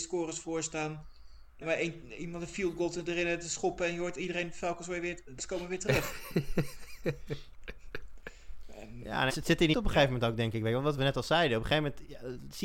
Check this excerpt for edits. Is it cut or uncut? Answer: cut